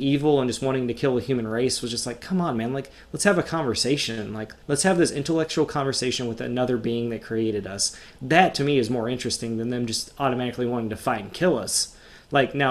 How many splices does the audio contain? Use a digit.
1